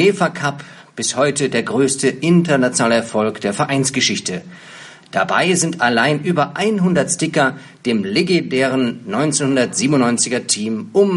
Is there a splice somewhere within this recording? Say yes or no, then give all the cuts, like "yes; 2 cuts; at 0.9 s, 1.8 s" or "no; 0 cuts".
no; 0 cuts